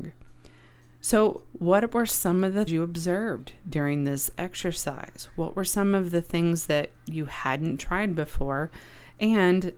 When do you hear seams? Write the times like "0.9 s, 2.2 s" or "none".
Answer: 2.7 s